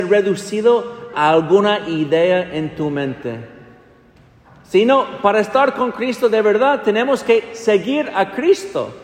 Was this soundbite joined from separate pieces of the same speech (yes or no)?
yes